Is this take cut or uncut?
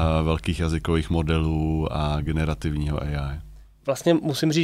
uncut